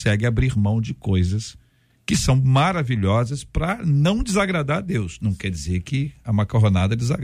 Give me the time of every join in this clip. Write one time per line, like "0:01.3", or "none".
none

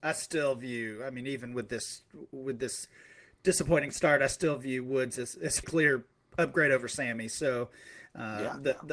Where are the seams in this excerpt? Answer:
0:05.6

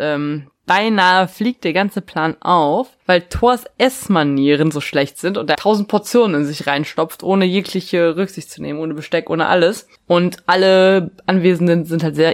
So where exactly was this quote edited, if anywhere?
0:03.0
0:05.5

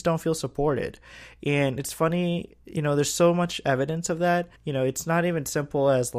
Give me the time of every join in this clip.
0:04.6

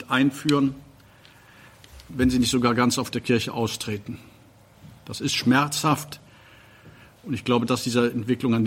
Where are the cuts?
0:07.7

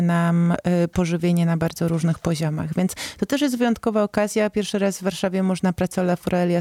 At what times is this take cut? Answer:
none

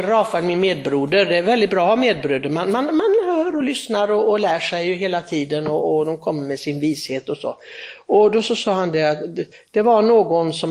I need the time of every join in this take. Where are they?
none

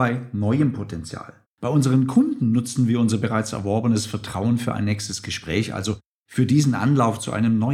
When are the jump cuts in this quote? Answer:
0:01.4

